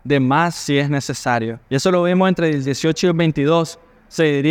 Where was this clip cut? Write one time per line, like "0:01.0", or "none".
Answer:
0:01.7

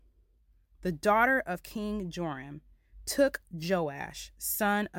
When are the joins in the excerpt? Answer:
none

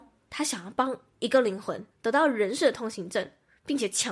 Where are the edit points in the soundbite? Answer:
0:01.9

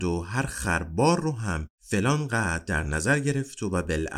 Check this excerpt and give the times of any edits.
none

